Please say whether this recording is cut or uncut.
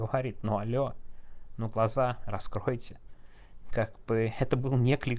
uncut